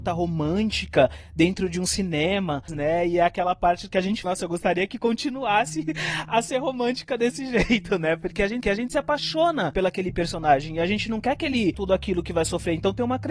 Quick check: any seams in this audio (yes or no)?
yes